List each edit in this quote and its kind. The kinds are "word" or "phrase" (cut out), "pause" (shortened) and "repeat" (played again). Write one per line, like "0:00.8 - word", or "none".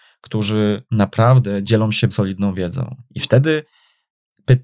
0:02.1 - word